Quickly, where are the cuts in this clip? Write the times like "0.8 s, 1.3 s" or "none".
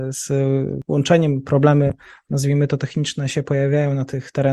none